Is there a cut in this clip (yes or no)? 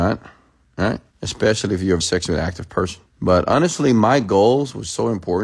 yes